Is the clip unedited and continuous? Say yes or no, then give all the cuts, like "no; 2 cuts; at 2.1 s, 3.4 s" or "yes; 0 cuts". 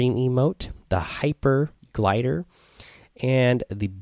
no; 1 cut; at 1.8 s